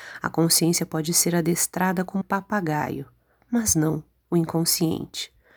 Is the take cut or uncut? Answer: cut